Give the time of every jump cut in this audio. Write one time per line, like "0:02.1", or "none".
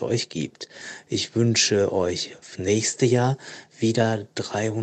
0:02.5